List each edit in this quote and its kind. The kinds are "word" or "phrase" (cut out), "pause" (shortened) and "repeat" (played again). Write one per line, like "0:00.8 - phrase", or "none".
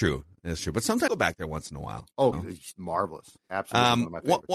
0:01.1 - word
0:02.3 - word
0:03.4 - pause